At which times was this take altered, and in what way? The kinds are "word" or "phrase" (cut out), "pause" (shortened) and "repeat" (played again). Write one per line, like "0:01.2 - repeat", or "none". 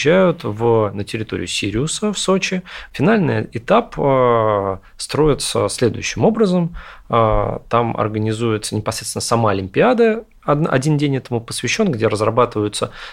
none